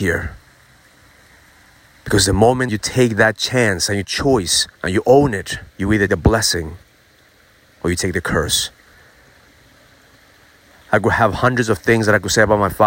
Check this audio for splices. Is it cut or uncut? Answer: cut